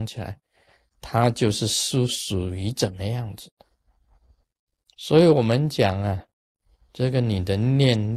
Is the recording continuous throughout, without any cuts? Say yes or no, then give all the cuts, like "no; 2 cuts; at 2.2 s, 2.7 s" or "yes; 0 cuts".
yes; 0 cuts